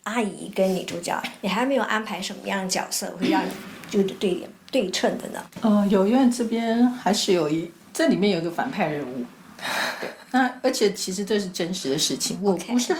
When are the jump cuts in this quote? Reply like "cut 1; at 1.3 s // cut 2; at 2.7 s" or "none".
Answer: cut 1; at 5.5 s // cut 2; at 7.8 s